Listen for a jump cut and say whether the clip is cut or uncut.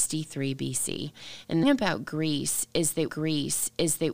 cut